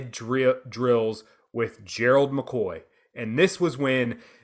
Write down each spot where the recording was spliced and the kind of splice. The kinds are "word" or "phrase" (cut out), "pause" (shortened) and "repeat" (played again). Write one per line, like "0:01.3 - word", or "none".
none